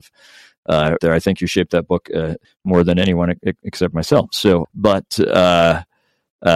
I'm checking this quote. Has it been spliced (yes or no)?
yes